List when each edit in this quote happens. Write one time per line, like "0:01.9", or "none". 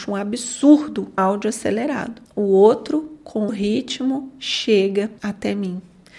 0:01.2
0:03.5
0:05.2